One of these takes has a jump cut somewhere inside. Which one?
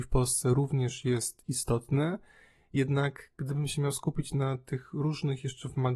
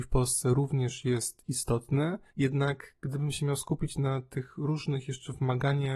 second; 1 cut; at 2.3 s

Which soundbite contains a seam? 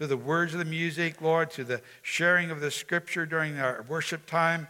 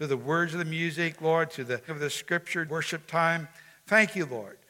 second; 2 cuts; at 1.9 s, 2.7 s

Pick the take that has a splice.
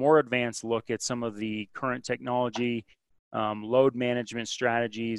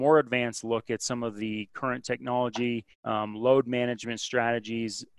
second; 1 cut; at 2.9 s

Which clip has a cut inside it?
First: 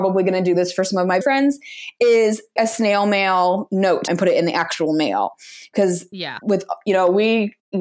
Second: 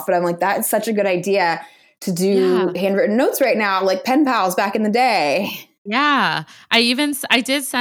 first; 3 cuts; at 1.2 s, 2.6 s, 4.1 s

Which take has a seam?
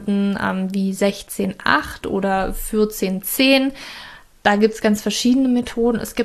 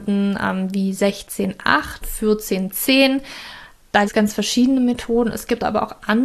second; 2 cuts; at 2.0 s, 4.0 s

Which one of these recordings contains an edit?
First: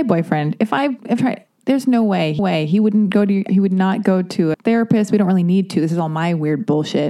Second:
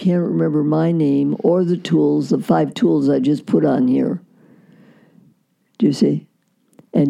first; 4 cuts; at 1.2 s, 2.4 s, 3.5 s, 4.5 s

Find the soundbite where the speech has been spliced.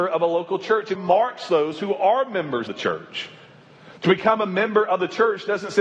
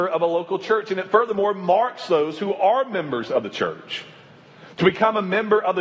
first; 2 cuts; at 0.9 s, 2.7 s

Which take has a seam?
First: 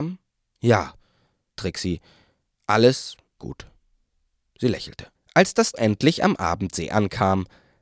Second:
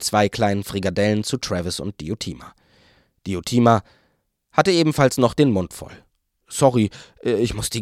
first; 4 cuts; at 1.6 s, 3.4 s, 5.1 s, 5.7 s

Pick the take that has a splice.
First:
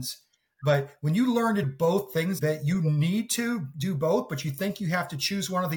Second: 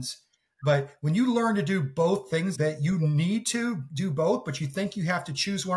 first; 1 cut; at 1.6 s

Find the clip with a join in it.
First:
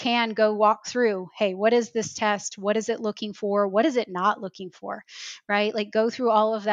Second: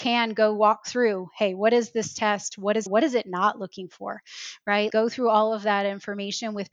second; 2 cuts; at 2.9 s, 4.9 s

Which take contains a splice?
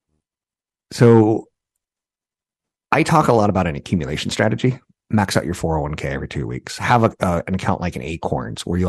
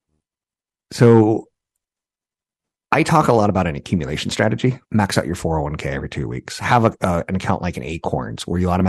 second; 1 cut; at 4.8 s

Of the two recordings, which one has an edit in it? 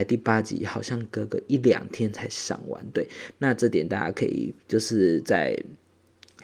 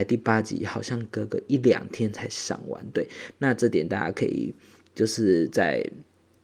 first; 1 cut; at 4.6 s

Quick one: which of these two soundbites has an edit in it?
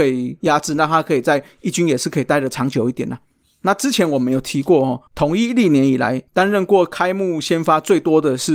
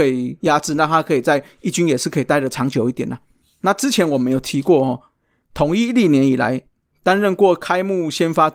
first; 2 cuts; at 5.1 s, 6.3 s

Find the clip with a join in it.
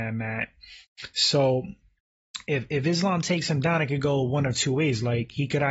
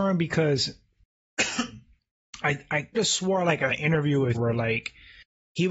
second; 3 cuts; at 2.9 s, 3.7 s, 4.3 s

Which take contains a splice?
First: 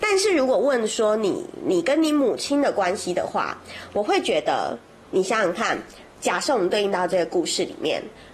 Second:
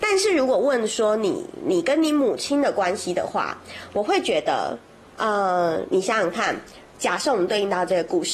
first; 1 cut; at 5.1 s

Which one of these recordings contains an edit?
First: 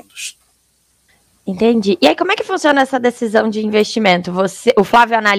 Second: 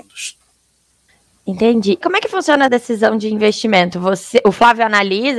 second; 2 cuts; at 2.0 s, 2.7 s

